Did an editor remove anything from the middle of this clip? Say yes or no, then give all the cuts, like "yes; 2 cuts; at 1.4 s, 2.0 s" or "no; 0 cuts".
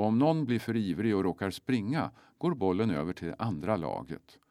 no; 0 cuts